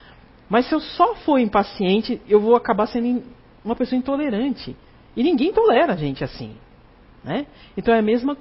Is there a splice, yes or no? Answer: no